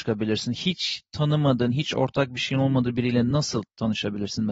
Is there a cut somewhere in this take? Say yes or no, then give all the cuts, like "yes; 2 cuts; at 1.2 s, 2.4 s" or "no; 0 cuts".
no; 0 cuts